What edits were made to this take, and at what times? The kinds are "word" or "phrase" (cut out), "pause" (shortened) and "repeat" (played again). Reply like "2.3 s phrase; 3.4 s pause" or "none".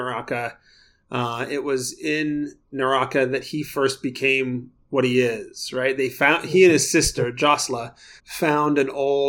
2.7 s pause; 8.2 s pause